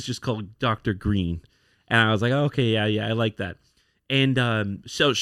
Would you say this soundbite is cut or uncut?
uncut